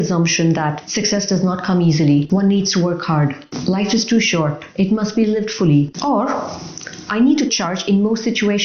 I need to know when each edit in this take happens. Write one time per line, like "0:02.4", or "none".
0:07.5

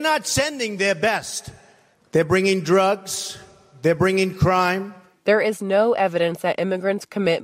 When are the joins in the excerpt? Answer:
none

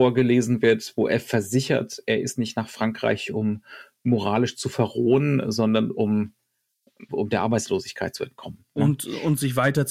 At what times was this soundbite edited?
0:07.1

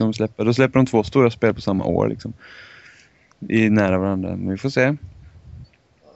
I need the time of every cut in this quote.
none

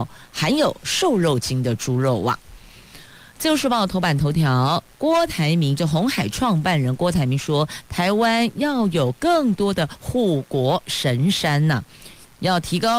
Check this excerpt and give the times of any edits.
none

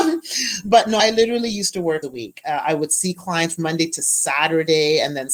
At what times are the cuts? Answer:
0:02.0

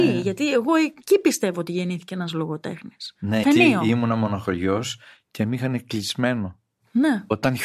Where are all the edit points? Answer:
0:03.4

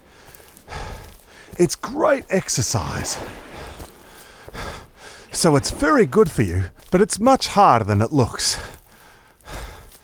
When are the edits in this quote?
0:06.8

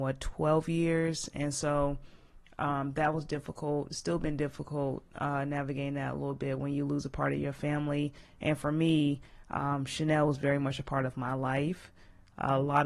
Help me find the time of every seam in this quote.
none

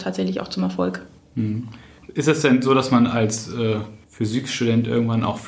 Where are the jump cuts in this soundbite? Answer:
0:01.2
0:04.0

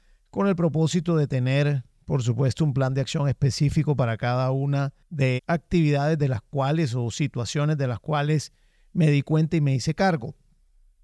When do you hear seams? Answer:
0:05.4

